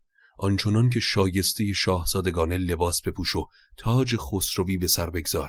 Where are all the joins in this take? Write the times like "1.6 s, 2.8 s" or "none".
none